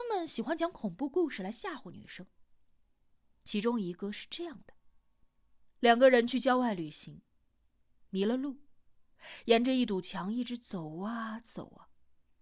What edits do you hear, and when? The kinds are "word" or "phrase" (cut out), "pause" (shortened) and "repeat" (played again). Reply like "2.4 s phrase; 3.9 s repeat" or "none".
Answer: none